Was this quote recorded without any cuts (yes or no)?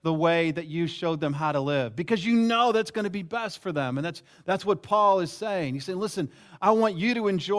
yes